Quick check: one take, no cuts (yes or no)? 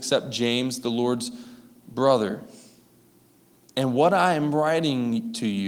yes